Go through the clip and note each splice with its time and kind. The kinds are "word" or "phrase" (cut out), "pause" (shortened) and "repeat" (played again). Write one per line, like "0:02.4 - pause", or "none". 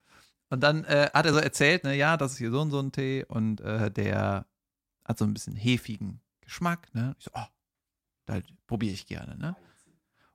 none